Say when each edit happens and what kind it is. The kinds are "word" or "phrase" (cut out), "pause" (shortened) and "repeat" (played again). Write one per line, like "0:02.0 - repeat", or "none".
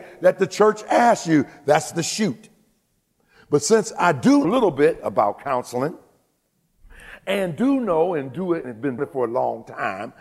0:04.4 - word
0:08.6 - word
0:09.0 - word